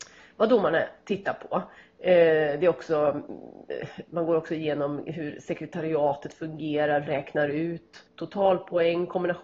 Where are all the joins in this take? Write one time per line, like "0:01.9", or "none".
0:07.1
0:08.1